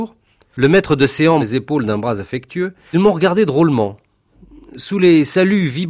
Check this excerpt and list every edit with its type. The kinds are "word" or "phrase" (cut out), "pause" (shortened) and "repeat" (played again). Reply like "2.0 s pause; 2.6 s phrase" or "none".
1.4 s word; 2.9 s word